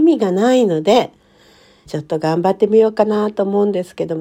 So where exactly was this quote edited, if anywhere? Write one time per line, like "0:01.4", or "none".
0:01.9